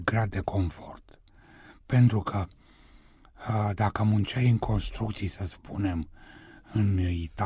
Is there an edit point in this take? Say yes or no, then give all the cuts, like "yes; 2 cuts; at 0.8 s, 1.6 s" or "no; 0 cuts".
no; 0 cuts